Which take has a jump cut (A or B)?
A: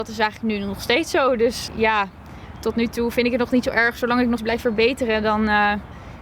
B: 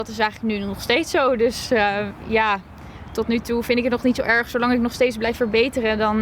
A